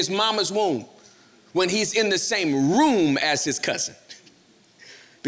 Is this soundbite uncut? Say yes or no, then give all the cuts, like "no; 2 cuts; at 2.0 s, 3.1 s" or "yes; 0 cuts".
yes; 0 cuts